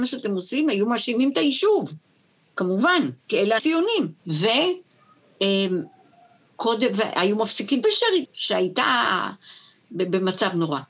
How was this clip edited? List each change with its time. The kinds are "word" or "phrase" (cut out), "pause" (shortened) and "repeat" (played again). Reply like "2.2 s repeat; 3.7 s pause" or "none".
3.2 s pause; 3.6 s word; 4.2 s pause; 7.8 s word; 8.2 s word